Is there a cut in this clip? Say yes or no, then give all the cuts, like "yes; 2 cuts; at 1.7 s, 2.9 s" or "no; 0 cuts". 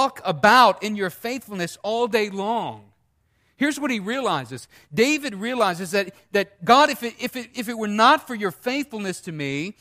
no; 0 cuts